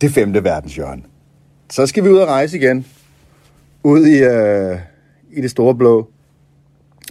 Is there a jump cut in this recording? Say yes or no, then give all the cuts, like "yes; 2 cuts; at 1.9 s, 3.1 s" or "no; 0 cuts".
no; 0 cuts